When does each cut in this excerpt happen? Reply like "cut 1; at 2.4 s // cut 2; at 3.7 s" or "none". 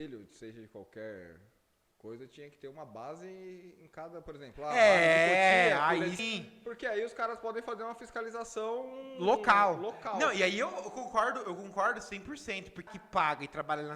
cut 1; at 6.2 s // cut 2; at 12.9 s

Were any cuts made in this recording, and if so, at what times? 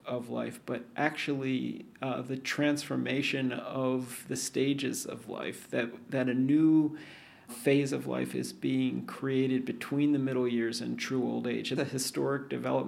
cut 1; at 7.5 s // cut 2; at 11.8 s

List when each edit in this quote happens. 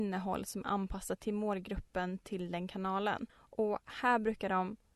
cut 1; at 3.3 s

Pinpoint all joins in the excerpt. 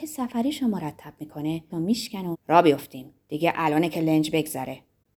cut 1; at 1.7 s // cut 2; at 2.3 s // cut 3; at 3.2 s

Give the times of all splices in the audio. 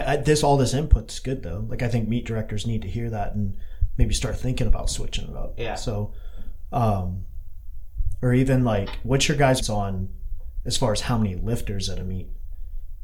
cut 1; at 9.6 s

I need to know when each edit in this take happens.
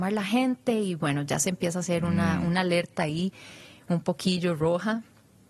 none

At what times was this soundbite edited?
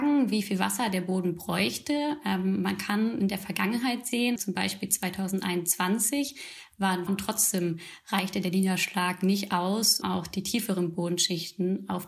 cut 1; at 4.4 s // cut 2; at 7.1 s // cut 3; at 10.0 s

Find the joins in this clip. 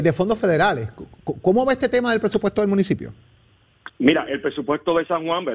none

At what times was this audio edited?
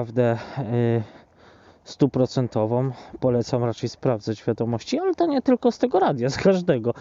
none

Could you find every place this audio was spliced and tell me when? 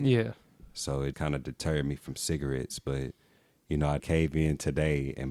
cut 1; at 1.1 s // cut 2; at 4.0 s

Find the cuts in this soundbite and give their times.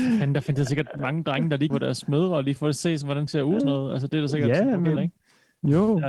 cut 1; at 1.7 s // cut 2; at 2.6 s // cut 3; at 3.3 s // cut 4; at 3.6 s // cut 5; at 5.0 s

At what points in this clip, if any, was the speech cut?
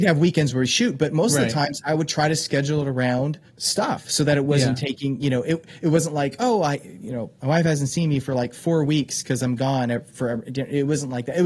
cut 1; at 3.5 s

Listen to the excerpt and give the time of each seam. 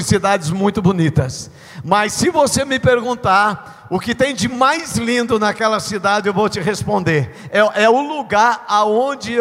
none

